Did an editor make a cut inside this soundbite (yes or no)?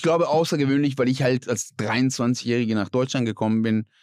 no